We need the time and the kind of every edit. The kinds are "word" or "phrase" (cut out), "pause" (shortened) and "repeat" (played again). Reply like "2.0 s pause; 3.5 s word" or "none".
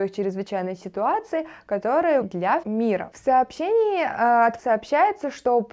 2.2 s word; 2.6 s word; 4.6 s word